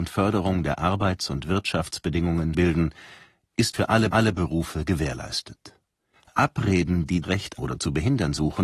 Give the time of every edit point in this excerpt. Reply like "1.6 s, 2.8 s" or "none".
2.5 s, 3.7 s, 4.1 s, 6.1 s, 7.2 s, 7.6 s